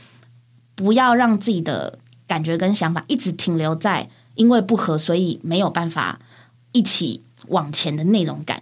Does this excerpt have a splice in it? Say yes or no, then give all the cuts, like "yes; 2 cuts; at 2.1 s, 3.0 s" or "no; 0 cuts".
no; 0 cuts